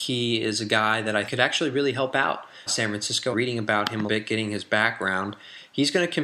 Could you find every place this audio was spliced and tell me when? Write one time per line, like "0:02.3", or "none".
0:01.3
0:02.7
0:03.3
0:04.1